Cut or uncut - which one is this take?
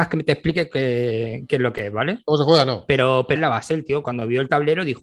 cut